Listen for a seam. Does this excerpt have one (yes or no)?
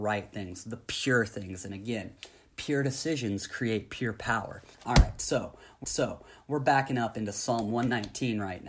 yes